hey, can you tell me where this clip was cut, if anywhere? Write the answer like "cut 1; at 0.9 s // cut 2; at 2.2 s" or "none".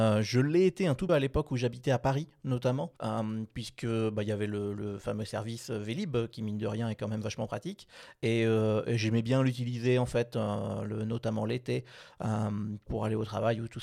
cut 1; at 1.1 s // cut 2; at 3.0 s // cut 3; at 12.9 s